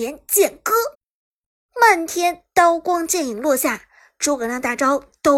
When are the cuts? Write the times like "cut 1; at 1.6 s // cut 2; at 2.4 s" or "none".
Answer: cut 1; at 0.9 s